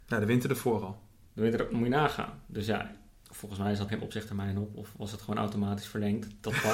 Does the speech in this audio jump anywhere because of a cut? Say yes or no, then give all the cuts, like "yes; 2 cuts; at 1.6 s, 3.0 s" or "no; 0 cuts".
yes; 1 cut; at 3.9 s